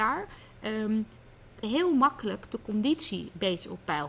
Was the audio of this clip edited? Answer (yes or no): yes